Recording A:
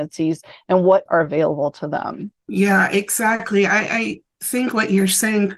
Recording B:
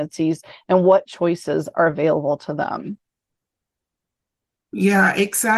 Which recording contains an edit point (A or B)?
A